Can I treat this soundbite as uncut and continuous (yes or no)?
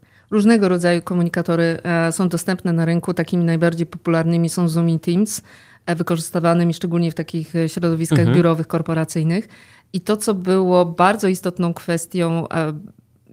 yes